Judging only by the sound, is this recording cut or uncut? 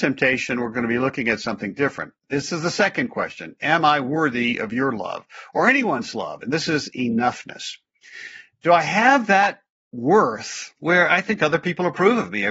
cut